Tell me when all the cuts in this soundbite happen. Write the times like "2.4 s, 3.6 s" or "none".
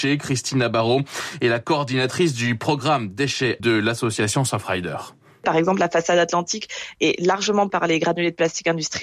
3.6 s, 7.7 s